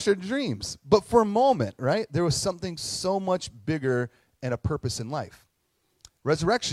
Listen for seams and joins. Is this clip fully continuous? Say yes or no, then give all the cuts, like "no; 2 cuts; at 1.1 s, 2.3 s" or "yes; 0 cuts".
yes; 0 cuts